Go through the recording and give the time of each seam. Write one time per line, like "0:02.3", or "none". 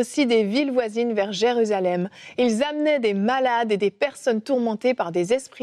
none